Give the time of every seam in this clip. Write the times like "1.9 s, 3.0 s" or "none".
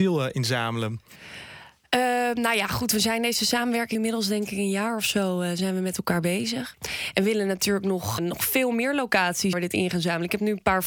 3.9 s, 8.2 s, 9.5 s